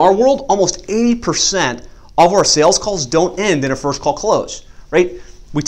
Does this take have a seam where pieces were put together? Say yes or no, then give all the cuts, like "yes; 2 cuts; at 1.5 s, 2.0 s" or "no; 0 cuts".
no; 0 cuts